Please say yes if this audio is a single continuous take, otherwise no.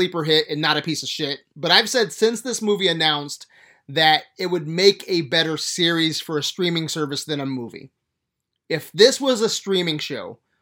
yes